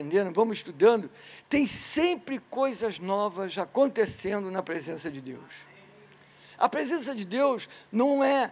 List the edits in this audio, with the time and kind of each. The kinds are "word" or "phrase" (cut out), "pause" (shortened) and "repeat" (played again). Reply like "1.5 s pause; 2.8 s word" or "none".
none